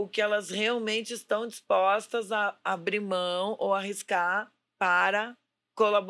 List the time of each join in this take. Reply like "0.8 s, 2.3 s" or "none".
none

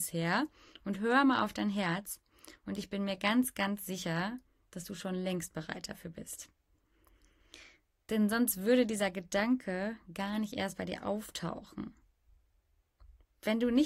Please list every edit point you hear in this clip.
none

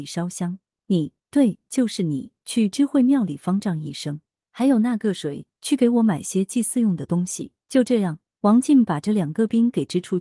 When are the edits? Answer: 7.6 s

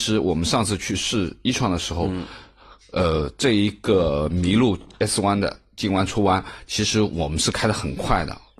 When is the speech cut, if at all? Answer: none

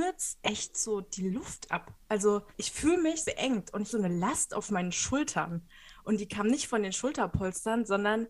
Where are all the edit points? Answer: 2.5 s, 3.2 s, 3.9 s

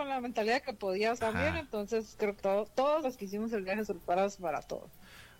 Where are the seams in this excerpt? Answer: 1.2 s, 2.4 s, 3.0 s, 3.8 s

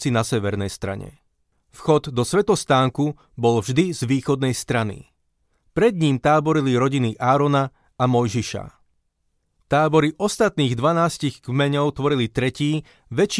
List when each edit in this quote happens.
none

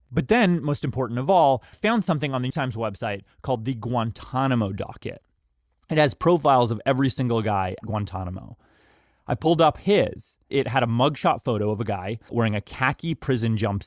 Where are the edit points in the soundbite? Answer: 1.7 s, 2.5 s, 7.8 s, 10.5 s, 12.3 s

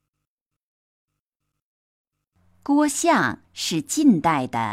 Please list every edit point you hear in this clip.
3.4 s

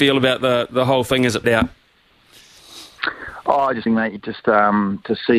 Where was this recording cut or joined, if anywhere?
1.4 s, 3.9 s, 4.2 s

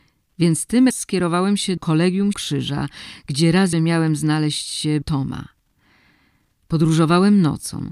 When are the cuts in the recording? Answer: 0.9 s, 1.8 s, 2.3 s, 3.7 s, 5.0 s

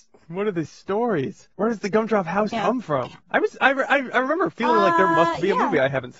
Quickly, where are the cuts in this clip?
1.5 s, 2.5 s, 3.2 s

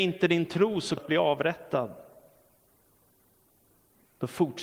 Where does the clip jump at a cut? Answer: 1.0 s

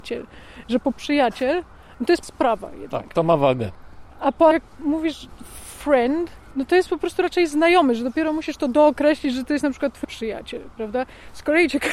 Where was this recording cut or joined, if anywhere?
0.9 s, 2.2 s, 4.5 s, 10.0 s

